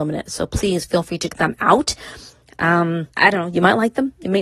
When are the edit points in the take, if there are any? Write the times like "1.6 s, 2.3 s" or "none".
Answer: 1.3 s, 3.1 s